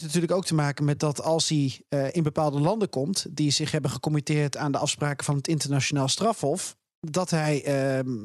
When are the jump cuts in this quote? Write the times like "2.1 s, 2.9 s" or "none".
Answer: none